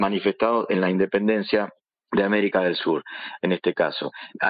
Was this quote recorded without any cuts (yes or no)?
yes